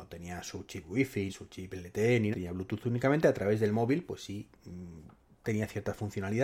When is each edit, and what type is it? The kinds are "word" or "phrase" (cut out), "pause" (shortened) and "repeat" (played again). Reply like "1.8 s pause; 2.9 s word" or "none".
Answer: 1.3 s word; 2.3 s word